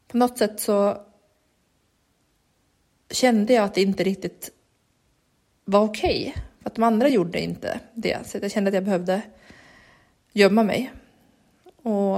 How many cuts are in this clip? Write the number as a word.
zero